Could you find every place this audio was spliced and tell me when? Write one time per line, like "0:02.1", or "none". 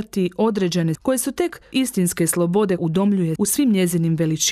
0:00.9
0:01.7
0:02.8
0:03.4